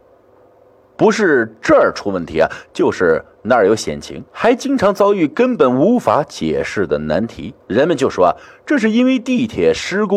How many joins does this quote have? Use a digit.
2